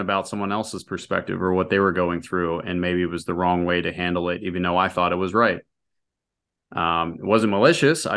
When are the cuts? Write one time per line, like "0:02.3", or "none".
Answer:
none